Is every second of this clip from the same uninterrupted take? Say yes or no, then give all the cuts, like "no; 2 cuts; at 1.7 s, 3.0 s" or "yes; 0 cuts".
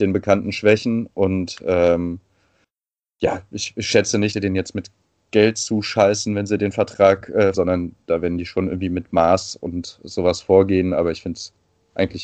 no; 2 cuts; at 4.3 s, 7.5 s